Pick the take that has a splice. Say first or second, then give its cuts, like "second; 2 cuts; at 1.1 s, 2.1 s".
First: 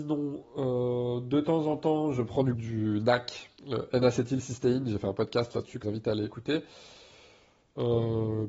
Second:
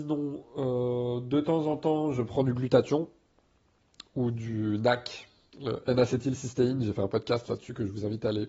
first; 3 cuts; at 2.5 s, 3.6 s, 5.8 s